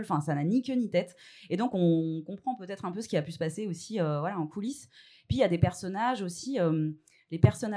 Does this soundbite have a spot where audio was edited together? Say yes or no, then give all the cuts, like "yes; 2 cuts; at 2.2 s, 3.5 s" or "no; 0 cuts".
no; 0 cuts